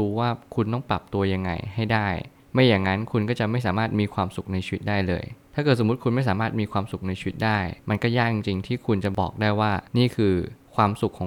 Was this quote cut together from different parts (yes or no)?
yes